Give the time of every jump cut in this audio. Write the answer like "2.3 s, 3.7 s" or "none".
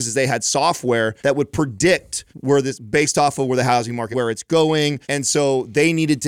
1.2 s, 2.3 s, 4.1 s, 5.0 s